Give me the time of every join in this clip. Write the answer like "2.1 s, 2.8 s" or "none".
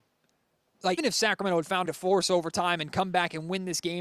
1.0 s, 1.9 s